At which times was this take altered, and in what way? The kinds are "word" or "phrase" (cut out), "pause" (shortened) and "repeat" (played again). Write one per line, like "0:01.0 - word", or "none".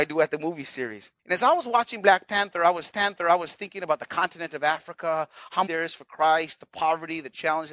0:01.2 - pause
0:02.9 - repeat
0:05.7 - phrase